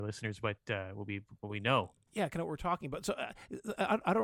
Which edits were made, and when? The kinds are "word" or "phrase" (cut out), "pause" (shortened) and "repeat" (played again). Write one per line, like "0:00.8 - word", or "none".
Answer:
none